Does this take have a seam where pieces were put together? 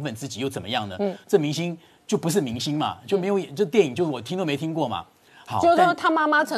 no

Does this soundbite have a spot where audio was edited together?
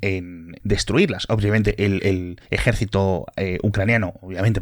yes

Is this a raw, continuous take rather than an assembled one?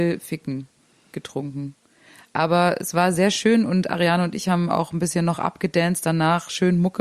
yes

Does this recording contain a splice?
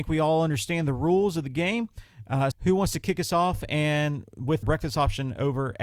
yes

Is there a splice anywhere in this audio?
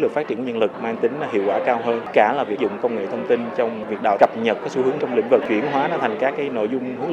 yes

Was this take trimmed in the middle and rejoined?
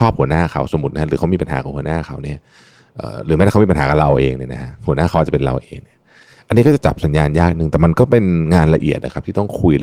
no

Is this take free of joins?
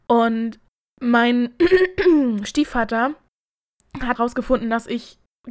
no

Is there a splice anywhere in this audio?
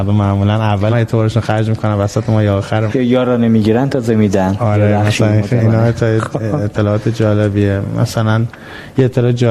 yes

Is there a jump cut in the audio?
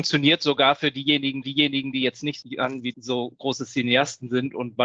yes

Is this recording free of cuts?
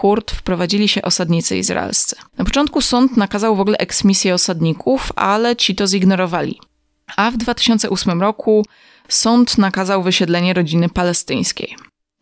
no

